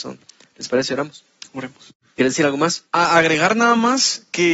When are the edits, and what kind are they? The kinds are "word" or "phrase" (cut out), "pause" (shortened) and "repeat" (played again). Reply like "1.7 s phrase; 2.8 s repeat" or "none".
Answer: 2.9 s pause